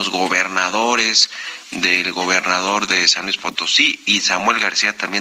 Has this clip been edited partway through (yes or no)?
yes